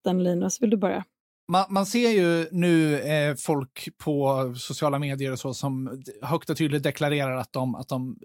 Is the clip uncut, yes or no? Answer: yes